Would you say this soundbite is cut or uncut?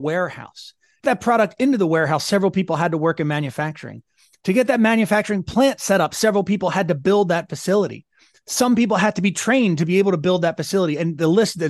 cut